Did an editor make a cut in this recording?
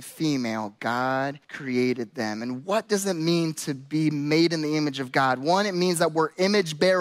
yes; 1 cut; at 1.4 s

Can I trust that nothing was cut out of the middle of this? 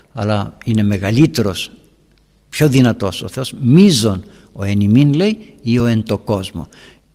yes; 0 cuts

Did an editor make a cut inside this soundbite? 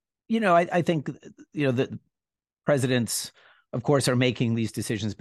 no; 0 cuts

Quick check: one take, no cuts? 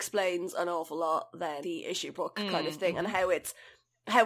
no; 2 cuts; at 1.6 s, 2.1 s

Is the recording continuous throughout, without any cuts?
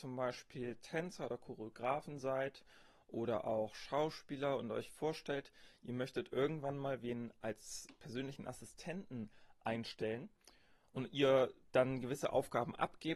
yes; 0 cuts

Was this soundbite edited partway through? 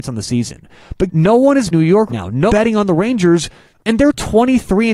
yes; 4 cuts; at 1.1 s, 1.7 s, 2.1 s, 2.5 s

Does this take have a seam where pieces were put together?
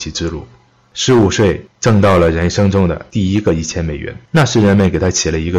yes; 2 cuts; at 1.7 s, 4.3 s

